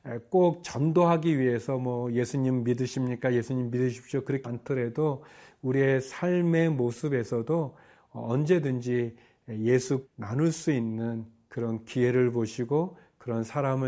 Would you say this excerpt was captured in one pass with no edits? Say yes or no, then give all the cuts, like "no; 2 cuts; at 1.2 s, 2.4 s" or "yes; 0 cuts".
no; 2 cuts; at 4.4 s, 10.0 s